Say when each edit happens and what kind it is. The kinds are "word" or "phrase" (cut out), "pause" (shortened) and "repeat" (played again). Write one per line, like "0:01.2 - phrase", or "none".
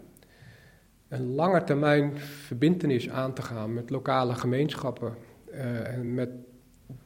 none